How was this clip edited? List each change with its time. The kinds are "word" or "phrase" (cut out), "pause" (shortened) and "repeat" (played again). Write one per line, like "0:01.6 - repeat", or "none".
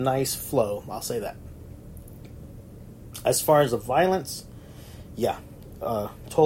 none